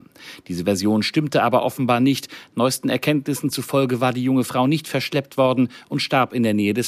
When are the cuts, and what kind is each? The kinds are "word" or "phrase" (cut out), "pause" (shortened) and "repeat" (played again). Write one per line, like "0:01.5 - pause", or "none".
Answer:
none